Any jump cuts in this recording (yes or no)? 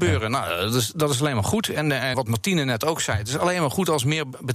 yes